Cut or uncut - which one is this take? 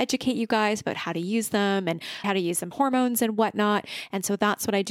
cut